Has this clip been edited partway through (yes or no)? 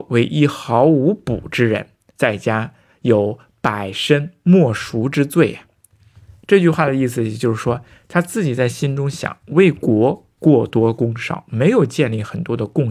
no